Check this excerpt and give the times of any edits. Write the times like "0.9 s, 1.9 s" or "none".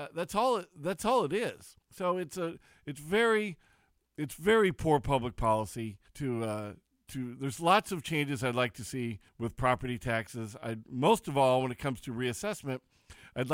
1.8 s, 6.1 s, 9.3 s